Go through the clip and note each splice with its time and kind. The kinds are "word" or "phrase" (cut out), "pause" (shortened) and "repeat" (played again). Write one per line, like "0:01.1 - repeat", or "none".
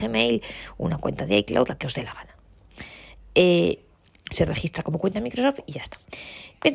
0:03.9 - pause